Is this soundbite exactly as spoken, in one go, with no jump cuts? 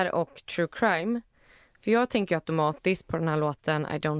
yes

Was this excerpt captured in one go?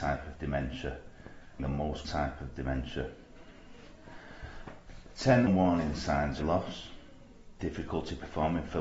no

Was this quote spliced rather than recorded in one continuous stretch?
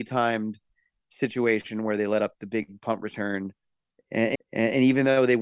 yes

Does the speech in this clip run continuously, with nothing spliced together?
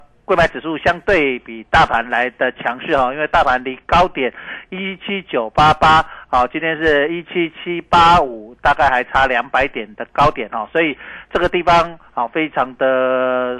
yes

